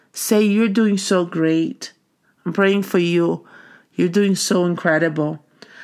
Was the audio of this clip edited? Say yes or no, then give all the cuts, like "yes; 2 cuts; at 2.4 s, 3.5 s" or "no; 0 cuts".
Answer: no; 0 cuts